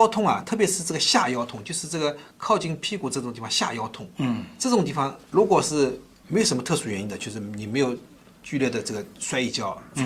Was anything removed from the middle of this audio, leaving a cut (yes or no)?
no